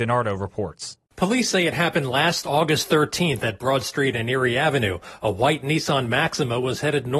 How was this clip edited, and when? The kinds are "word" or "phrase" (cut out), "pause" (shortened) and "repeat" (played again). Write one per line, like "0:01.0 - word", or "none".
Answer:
none